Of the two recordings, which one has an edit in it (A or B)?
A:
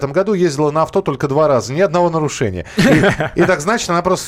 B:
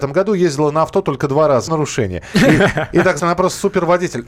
B